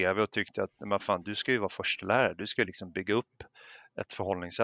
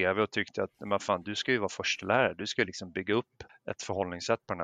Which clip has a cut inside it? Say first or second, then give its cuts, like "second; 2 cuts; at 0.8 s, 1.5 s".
second; 1 cut; at 3.5 s